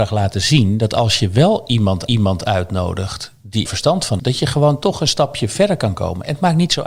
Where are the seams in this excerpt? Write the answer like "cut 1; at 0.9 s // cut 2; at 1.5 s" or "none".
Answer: cut 1; at 2.1 s // cut 2; at 3.7 s // cut 3; at 4.2 s